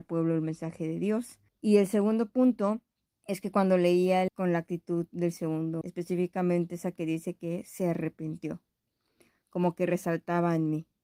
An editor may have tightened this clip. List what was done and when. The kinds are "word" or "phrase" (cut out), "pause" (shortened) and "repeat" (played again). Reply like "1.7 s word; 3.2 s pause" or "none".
1.5 s pause; 3.1 s pause; 4.3 s phrase; 5.8 s word